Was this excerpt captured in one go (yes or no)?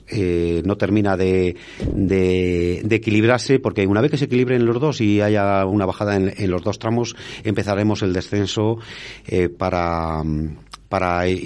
yes